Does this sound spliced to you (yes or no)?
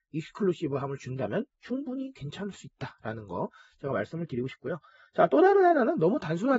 no